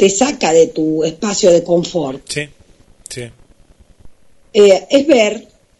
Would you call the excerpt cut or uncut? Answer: uncut